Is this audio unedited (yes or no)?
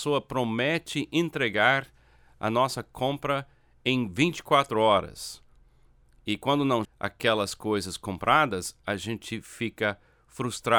no